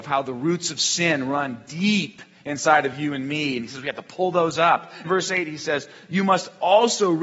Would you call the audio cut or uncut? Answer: cut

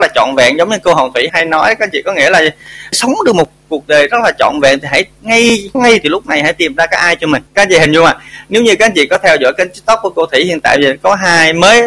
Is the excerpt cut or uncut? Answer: cut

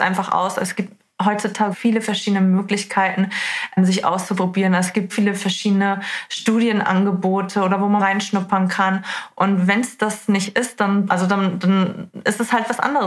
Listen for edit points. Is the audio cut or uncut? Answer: cut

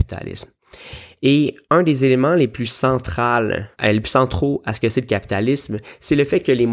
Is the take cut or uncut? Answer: cut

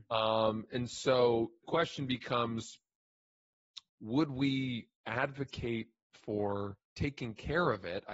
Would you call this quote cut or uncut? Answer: cut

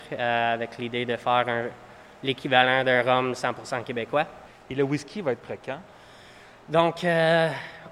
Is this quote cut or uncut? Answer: uncut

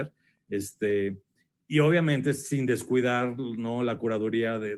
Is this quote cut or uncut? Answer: uncut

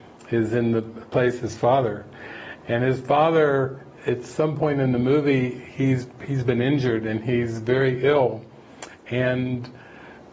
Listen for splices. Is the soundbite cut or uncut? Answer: uncut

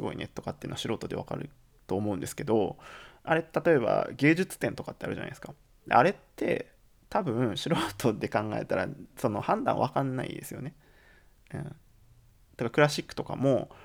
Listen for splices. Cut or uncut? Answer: uncut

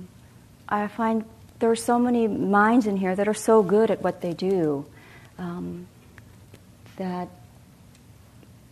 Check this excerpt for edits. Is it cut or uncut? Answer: cut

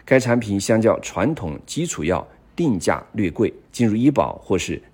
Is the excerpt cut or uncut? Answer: cut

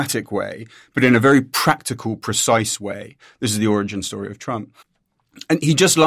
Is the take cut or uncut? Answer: uncut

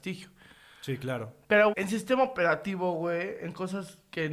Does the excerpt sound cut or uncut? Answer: cut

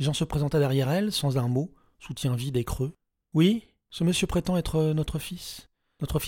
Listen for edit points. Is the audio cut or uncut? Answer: uncut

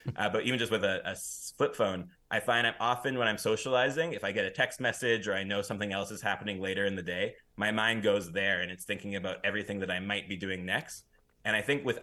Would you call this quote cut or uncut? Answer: uncut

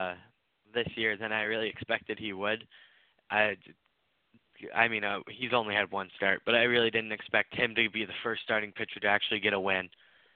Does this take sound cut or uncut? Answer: uncut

